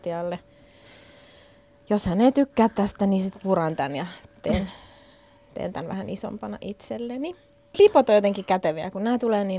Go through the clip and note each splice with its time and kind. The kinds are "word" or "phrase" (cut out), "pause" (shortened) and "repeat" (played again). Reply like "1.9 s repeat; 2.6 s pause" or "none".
none